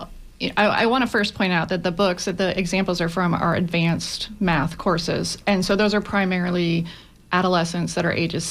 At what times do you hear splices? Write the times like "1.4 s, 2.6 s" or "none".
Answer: none